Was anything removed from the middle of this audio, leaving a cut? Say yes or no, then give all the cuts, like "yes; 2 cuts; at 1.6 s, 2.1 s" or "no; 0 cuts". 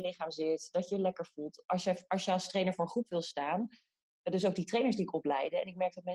no; 0 cuts